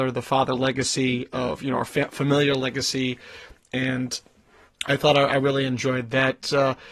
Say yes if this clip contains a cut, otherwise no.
no